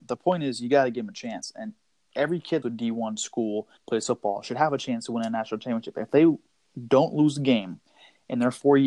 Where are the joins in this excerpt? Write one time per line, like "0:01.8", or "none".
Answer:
0:02.6
0:03.8